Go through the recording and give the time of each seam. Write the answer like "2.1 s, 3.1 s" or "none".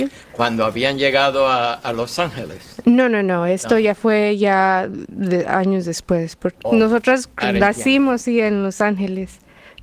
none